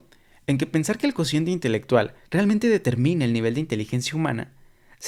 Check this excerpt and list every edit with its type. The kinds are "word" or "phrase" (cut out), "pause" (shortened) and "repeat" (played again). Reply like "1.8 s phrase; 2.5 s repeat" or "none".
2.2 s pause

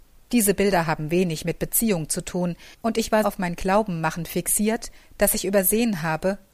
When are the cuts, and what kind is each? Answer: 2.7 s pause; 3.2 s word

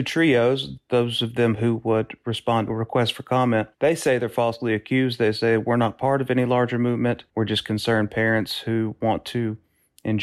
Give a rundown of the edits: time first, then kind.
3.7 s pause; 7.3 s pause

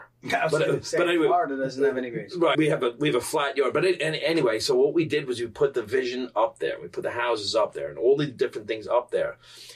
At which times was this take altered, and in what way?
2.5 s word

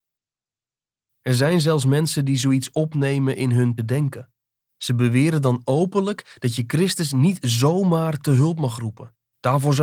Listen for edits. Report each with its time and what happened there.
3.8 s word

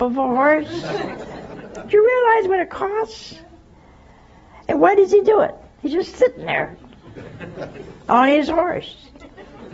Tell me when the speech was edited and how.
none

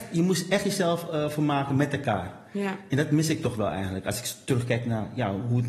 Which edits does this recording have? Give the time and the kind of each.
none

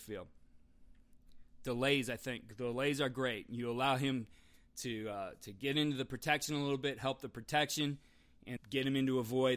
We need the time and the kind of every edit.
8.6 s word

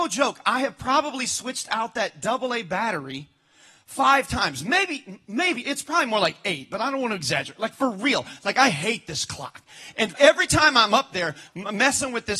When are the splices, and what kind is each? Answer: 10.2 s word

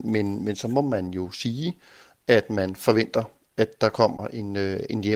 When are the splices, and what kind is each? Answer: none

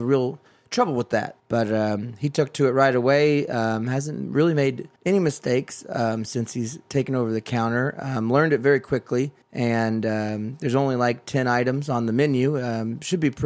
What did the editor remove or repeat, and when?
1.4 s pause; 5.0 s pause; 9.4 s pause

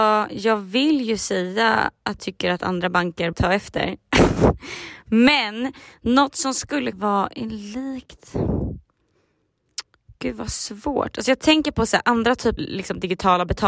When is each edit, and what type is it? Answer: 2.2 s word; 3.3 s word; 6.9 s word; 12.6 s word

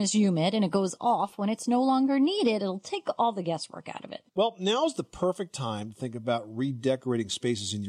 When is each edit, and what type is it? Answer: 4.3 s pause

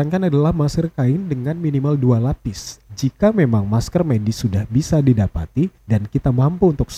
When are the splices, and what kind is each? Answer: 2.9 s pause; 5.8 s pause

